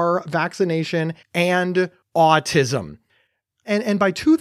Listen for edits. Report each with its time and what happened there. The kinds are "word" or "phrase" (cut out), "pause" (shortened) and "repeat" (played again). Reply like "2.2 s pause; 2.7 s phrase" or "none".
1.2 s pause